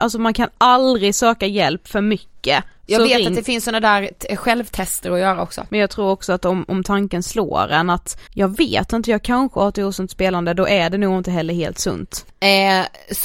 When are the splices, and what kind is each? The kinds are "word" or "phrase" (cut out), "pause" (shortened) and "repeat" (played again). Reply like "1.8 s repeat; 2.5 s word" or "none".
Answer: 2.8 s pause; 8.3 s pause